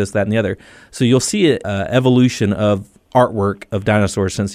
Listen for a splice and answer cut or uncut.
uncut